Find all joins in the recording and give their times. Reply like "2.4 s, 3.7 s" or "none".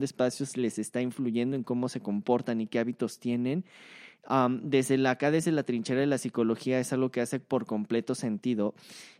none